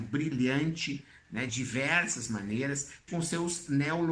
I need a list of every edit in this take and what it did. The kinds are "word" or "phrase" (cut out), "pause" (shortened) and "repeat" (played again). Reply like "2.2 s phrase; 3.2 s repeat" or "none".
1.5 s word; 3.1 s word